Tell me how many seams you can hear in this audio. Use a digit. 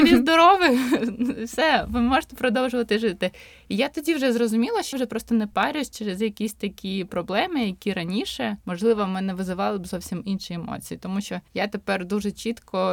3